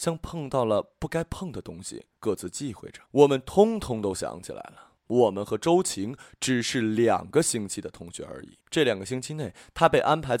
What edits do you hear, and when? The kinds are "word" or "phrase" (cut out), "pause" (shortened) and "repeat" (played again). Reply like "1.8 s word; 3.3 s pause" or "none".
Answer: 2.2 s pause; 3.1 s pause; 5.0 s pause; 8.6 s pause